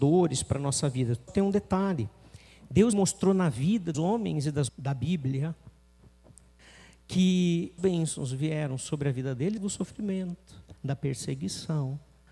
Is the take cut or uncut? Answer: cut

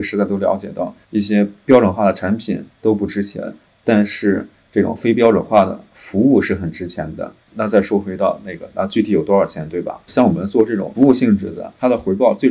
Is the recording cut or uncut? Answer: uncut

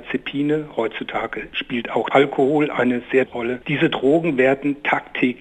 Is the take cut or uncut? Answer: cut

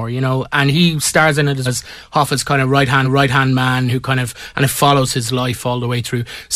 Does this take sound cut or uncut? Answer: cut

